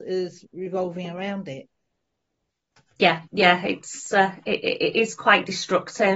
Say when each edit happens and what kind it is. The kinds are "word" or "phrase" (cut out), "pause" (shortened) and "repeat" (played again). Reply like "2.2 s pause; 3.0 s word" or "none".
3.3 s pause